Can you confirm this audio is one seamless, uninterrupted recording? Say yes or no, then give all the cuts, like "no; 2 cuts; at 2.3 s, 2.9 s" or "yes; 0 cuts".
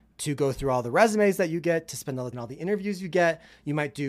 no; 1 cut; at 2.3 s